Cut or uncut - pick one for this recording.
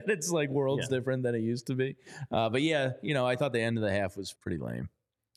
cut